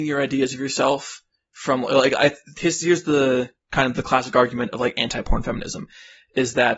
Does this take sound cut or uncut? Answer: uncut